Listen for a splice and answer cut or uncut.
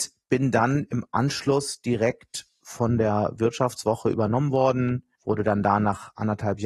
uncut